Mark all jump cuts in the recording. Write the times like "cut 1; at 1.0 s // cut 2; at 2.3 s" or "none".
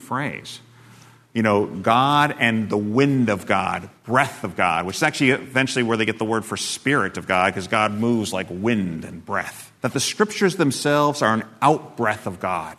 cut 1; at 9.8 s